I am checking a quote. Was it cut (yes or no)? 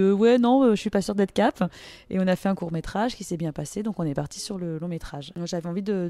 no